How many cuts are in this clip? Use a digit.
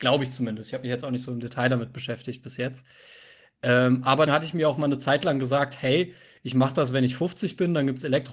1